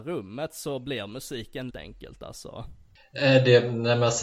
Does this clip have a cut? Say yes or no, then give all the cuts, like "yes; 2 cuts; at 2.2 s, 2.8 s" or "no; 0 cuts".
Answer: yes; 1 cut; at 1.7 s